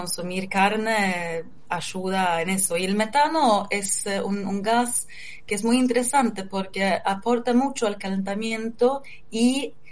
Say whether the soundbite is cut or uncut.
uncut